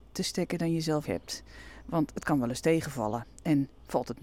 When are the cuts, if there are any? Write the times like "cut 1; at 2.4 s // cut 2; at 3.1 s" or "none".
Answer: cut 1; at 1.1 s